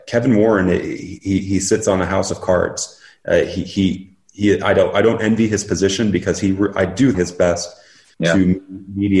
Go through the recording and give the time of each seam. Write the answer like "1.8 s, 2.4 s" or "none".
7.1 s